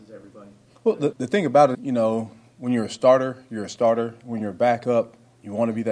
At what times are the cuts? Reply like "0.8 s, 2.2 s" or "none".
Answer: 1.1 s, 1.7 s